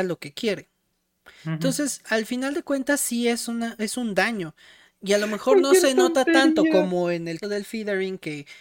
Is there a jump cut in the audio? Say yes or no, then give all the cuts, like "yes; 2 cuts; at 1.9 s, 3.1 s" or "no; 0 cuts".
yes; 1 cut; at 7.4 s